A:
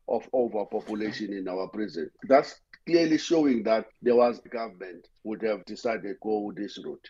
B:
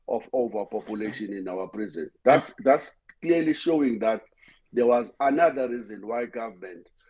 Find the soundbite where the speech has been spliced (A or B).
A